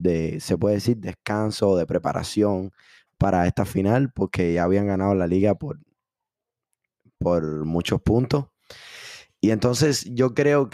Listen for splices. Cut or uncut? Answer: uncut